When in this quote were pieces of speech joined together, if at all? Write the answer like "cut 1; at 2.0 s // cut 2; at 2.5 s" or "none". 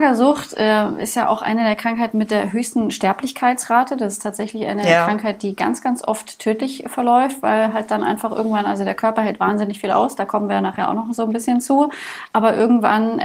none